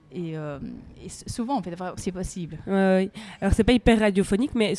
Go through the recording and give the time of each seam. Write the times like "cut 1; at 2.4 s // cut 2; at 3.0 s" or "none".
cut 1; at 2.0 s